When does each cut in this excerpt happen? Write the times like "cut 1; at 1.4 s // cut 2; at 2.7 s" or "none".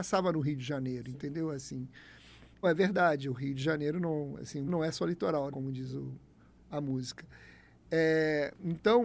cut 1; at 2.6 s // cut 2; at 4.7 s // cut 3; at 5.5 s